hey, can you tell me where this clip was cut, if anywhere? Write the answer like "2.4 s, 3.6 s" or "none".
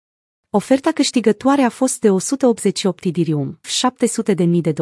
3.6 s